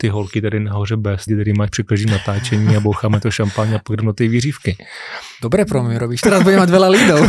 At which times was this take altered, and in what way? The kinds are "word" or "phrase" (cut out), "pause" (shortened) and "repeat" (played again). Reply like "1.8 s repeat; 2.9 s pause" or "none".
1.3 s word; 3.2 s word; 6.2 s word